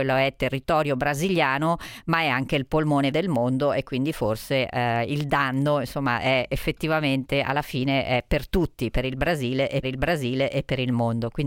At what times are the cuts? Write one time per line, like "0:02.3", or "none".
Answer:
0:03.1
0:09.8